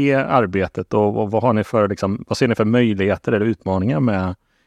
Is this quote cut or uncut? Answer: uncut